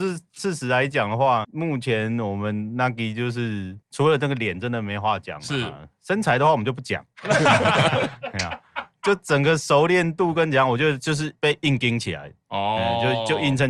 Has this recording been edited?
yes; 2 cuts; at 1.4 s, 3.8 s

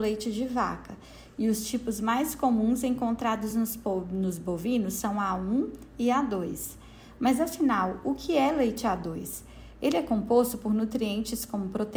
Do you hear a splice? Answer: no; 0 cuts

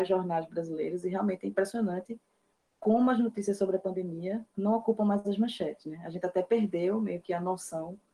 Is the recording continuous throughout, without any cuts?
yes; 0 cuts

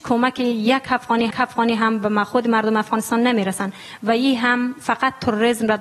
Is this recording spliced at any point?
yes; 1 cut; at 1.3 s

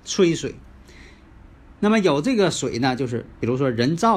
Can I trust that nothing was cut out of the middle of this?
no; 1 cut; at 1.7 s

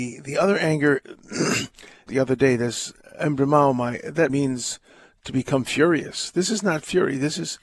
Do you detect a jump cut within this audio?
yes; 2 cuts; at 2.1 s, 4.3 s

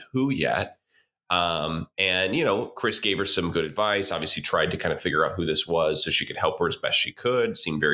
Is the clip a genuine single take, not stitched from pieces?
yes; 0 cuts

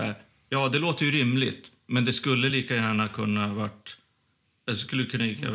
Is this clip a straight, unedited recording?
yes; 0 cuts

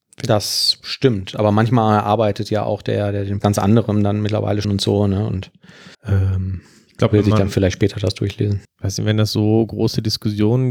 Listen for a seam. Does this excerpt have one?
yes; 4 cuts; at 3.4 s, 4.6 s, 5.9 s, 8.6 s

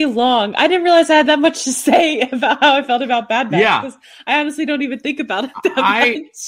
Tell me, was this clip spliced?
no; 0 cuts

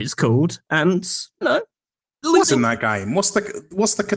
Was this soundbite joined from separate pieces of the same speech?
yes; 2 cuts; at 1.4 s, 2.4 s

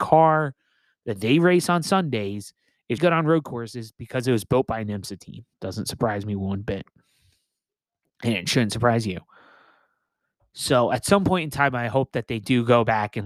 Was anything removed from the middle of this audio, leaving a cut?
yes; 2 cuts; at 3.0 s, 5.5 s

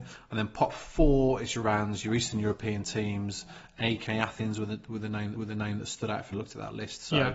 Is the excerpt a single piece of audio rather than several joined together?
no; 3 cuts; at 1.6 s, 5.3 s, 6.3 s

